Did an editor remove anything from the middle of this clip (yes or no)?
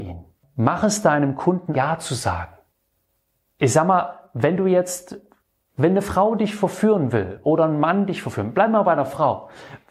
yes